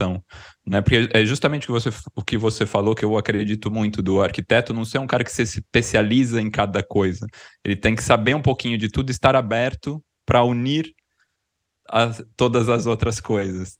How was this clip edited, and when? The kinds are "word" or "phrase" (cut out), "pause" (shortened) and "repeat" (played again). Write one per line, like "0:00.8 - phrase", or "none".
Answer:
none